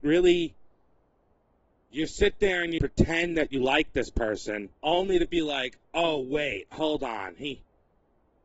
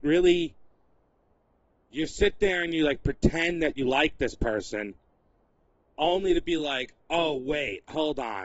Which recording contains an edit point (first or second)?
first